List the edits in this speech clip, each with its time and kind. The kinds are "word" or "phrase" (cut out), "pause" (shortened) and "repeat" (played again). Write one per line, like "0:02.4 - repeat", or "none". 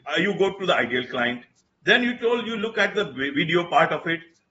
none